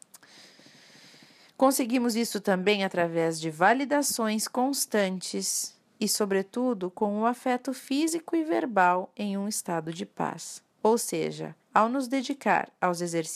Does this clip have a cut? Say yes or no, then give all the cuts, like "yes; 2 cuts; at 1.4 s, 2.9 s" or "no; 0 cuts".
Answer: yes; 2 cuts; at 10.7 s, 11.6 s